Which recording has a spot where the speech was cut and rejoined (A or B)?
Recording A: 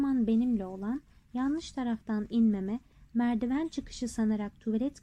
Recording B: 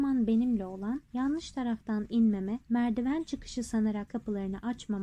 B